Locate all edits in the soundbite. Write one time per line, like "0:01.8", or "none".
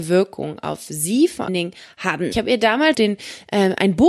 0:01.5
0:02.3
0:02.9